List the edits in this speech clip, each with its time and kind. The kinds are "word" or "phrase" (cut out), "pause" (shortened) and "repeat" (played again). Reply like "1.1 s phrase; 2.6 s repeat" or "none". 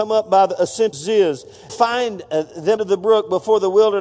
0.9 s word; 1.7 s phrase; 2.8 s phrase